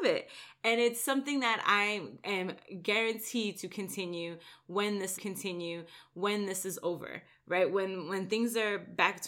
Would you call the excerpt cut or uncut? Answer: cut